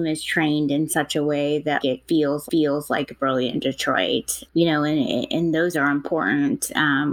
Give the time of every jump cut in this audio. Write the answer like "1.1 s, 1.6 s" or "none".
1.8 s, 2.5 s, 4.5 s, 5.7 s